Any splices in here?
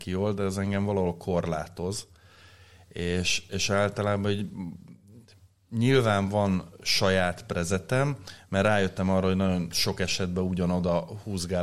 no; 0 cuts

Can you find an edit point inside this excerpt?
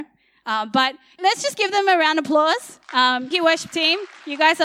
yes; 2 cuts; at 1.2 s, 3.3 s

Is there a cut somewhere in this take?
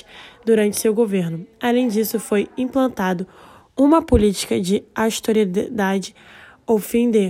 no; 0 cuts

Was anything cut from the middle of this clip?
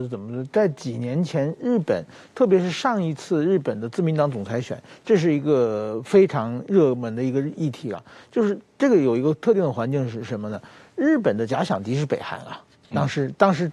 no; 0 cuts

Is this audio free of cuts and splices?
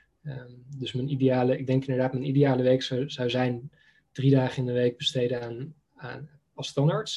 yes; 0 cuts

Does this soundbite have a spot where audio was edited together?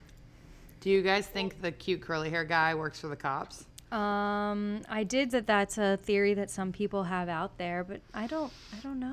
yes; 1 cut; at 5.3 s

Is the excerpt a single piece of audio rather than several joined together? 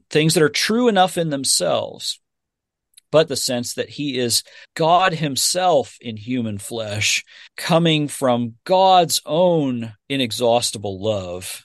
no; 4 cuts; at 3.3 s, 4.6 s, 7.5 s, 10.0 s

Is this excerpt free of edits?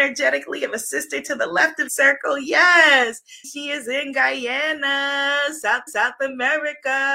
no; 3 cuts; at 1.9 s, 3.4 s, 5.9 s

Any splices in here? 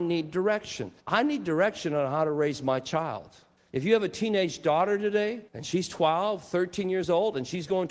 yes; 3 cuts; at 1.0 s, 3.6 s, 5.5 s

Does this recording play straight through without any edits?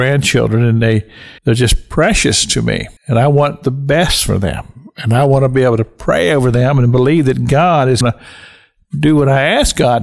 no; 3 cuts; at 1.4 s, 3.0 s, 8.0 s

